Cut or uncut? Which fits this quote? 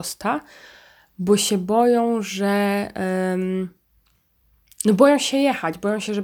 uncut